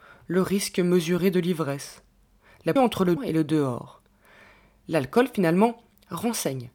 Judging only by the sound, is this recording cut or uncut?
cut